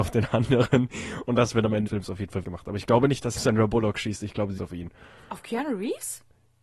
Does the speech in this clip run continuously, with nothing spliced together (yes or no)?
no